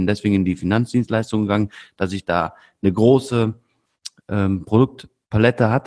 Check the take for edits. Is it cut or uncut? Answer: uncut